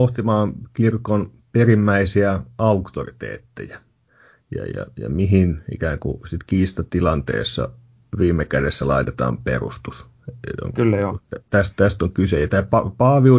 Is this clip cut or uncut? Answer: uncut